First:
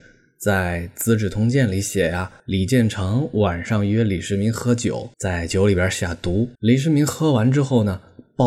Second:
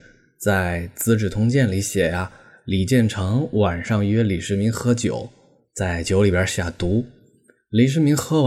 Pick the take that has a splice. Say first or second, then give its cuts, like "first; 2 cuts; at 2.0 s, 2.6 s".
first; 3 cuts; at 2.4 s, 5.1 s, 6.6 s